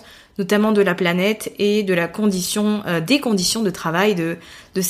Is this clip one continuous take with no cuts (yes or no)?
yes